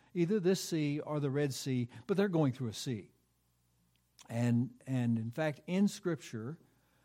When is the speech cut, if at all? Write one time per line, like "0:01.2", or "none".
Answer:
none